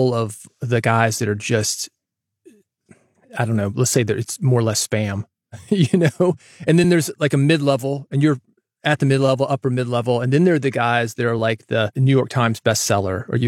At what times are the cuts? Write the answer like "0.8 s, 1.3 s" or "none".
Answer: none